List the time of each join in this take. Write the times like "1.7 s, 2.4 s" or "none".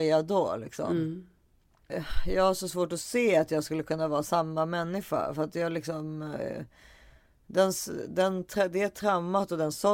none